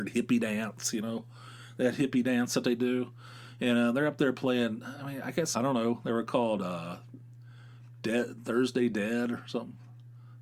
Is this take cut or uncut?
cut